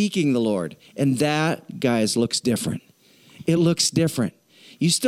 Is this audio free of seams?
yes; 0 cuts

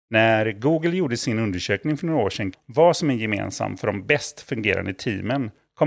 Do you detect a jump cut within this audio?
yes; 1 cut; at 2.5 s

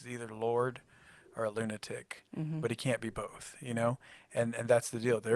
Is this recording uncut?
yes; 0 cuts

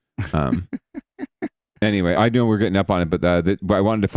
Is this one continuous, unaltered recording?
no; 1 cut; at 2.1 s

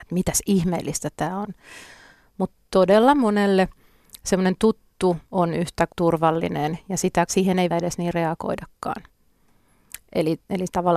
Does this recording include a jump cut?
yes; 5 cuts; at 2.7 s, 5.3 s, 5.9 s, 7.3 s, 7.7 s

